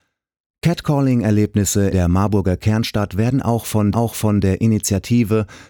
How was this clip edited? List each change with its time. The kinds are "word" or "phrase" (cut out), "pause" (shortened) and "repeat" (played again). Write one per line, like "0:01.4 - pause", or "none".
0:01.9 - word
0:03.9 - repeat